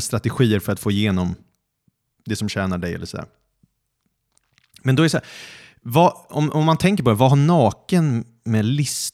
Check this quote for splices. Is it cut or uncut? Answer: uncut